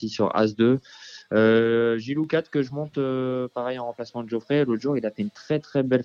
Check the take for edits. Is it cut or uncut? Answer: uncut